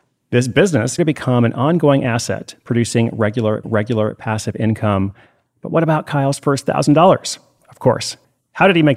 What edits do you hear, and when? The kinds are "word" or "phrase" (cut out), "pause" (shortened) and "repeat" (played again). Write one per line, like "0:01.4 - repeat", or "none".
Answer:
0:01.0 - word
0:03.6 - repeat